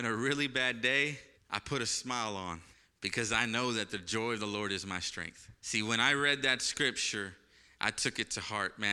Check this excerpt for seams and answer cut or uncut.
cut